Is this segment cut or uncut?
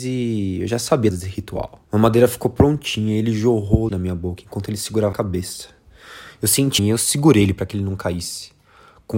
cut